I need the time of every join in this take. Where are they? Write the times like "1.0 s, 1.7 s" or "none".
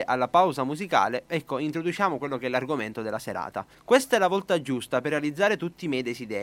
3.7 s